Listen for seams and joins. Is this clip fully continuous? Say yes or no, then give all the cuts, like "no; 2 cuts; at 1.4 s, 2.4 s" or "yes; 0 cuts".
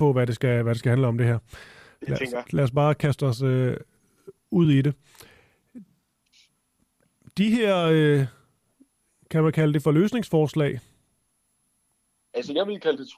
yes; 0 cuts